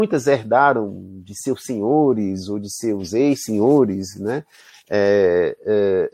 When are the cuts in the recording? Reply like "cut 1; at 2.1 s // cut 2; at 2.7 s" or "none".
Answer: none